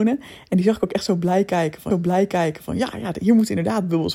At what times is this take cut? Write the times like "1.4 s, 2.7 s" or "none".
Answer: 1.9 s